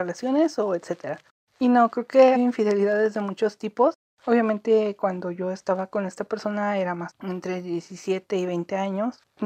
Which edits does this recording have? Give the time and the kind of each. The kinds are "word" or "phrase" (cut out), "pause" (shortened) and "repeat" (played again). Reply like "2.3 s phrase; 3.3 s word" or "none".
2.3 s word; 7.1 s phrase